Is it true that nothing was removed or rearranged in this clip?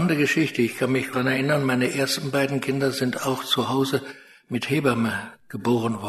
no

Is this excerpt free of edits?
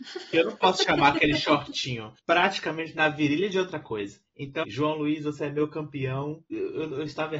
no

